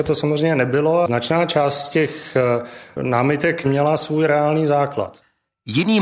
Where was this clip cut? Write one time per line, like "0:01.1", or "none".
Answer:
none